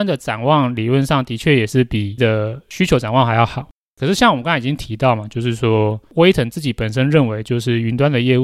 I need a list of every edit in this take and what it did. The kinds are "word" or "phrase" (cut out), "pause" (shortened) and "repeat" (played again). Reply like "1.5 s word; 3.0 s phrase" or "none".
2.2 s word

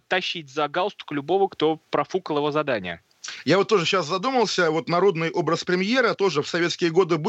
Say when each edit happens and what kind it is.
none

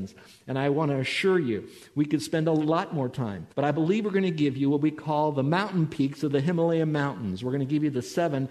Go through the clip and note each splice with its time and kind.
3.5 s pause

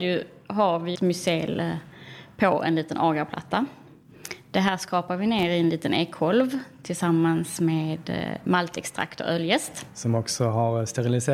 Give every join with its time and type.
0.9 s word

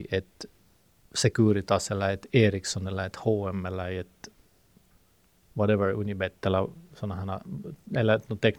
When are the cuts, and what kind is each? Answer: none

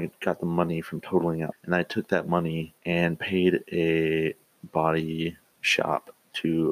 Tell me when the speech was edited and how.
1.5 s phrase; 2.8 s pause

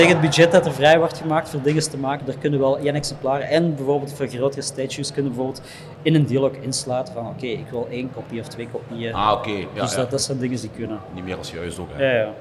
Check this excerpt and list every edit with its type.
none

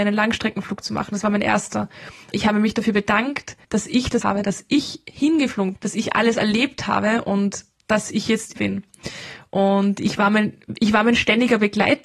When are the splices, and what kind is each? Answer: 3.6 s pause; 4.2 s phrase; 5.8 s word; 8.6 s word

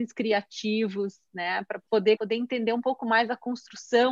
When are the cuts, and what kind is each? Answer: 2.2 s word

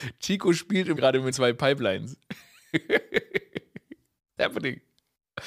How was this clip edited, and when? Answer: 1.0 s word; 1.3 s word; 4.4 s word

